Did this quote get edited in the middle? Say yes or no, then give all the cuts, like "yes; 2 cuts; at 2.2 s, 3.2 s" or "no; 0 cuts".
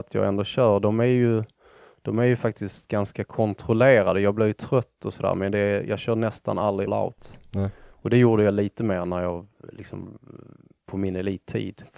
yes; 1 cut; at 6.9 s